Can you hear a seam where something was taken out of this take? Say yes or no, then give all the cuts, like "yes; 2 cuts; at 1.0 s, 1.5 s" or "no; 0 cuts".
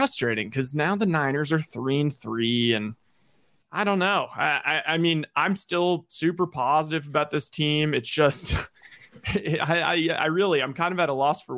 no; 0 cuts